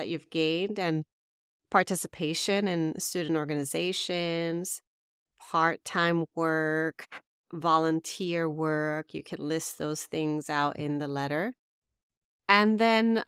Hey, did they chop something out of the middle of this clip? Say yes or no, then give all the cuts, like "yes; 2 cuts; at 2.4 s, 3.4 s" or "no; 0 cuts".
no; 0 cuts